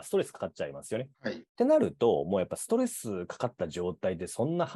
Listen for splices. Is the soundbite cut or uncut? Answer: cut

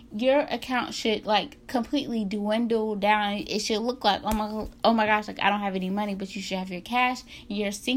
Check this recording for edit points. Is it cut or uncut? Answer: cut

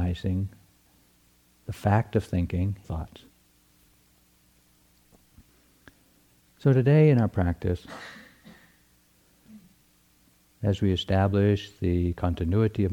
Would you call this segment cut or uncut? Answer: cut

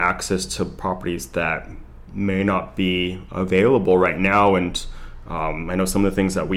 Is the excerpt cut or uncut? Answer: uncut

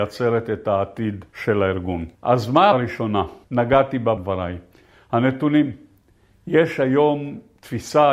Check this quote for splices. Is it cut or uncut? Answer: cut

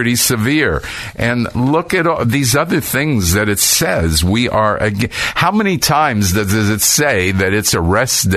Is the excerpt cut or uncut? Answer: uncut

